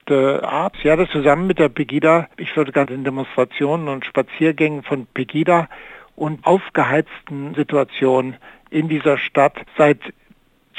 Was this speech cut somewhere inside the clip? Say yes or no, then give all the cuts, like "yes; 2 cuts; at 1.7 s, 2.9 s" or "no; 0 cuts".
yes; 5 cuts; at 1.1 s, 2.3 s, 2.9 s, 6.4 s, 9.7 s